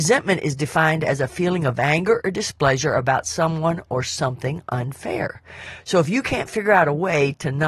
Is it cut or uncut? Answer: uncut